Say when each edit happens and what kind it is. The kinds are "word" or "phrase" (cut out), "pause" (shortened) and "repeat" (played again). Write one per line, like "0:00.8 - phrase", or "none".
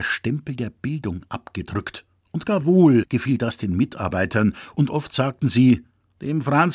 none